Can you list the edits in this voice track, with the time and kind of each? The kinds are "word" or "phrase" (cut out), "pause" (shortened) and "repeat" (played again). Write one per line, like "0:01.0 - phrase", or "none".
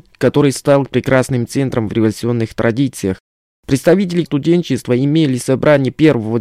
0:01.9 - word
0:04.3 - word